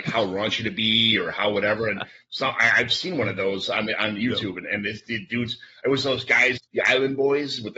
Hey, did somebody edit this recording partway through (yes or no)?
yes